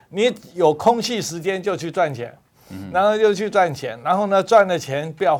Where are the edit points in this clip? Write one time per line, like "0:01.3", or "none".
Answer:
none